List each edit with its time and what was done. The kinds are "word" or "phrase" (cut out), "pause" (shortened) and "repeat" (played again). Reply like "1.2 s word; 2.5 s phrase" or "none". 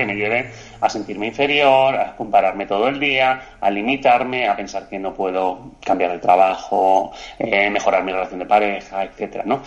none